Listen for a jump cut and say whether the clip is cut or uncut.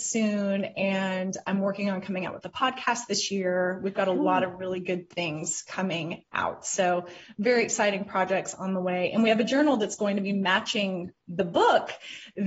uncut